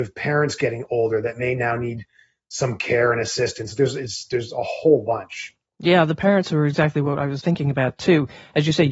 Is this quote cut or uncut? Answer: uncut